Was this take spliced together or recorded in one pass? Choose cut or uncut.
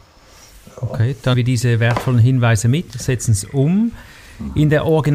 cut